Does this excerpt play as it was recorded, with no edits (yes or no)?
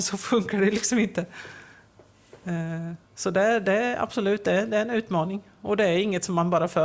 no